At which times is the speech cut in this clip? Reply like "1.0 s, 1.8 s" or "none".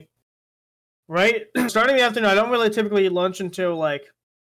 1.7 s